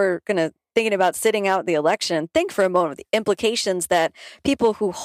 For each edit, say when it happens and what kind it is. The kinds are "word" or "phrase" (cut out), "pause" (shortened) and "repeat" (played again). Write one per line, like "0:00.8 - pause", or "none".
none